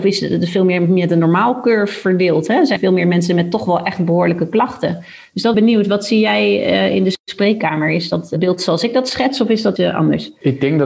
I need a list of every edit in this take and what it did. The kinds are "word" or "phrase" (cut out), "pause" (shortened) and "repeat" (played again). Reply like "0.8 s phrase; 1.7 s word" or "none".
2.8 s word; 5.5 s phrase; 9.8 s word